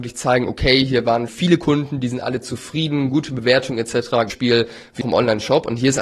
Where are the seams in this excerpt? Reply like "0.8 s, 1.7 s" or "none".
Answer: 1.3 s, 4.3 s, 5.0 s